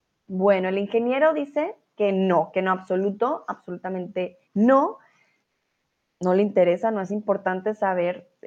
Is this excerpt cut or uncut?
cut